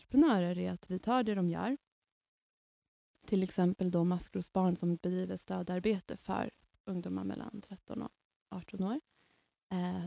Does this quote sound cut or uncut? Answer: uncut